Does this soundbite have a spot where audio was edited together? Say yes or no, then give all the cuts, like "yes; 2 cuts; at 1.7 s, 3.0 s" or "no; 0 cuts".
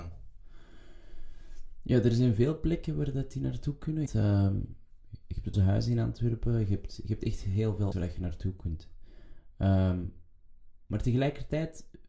yes; 3 cuts; at 4.1 s, 5.5 s, 7.9 s